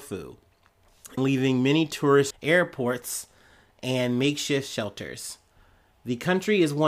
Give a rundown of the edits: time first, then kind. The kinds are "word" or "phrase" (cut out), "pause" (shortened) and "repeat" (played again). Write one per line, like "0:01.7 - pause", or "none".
0:01.2 - word
0:02.3 - phrase